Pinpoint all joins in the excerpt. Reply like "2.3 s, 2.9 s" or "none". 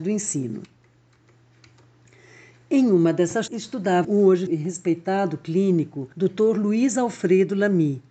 3.5 s, 4.0 s, 4.5 s, 6.1 s

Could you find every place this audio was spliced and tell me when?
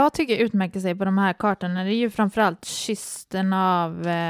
none

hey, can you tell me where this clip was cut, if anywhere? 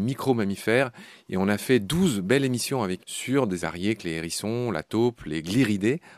3.0 s, 3.6 s

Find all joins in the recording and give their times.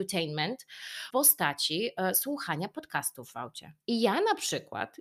1.1 s, 3.8 s

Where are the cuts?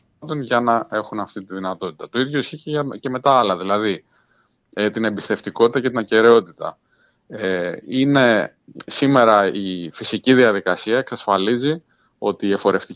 none

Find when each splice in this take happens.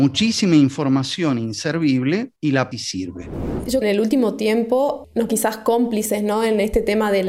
2.4 s, 2.7 s, 3.8 s, 5.3 s

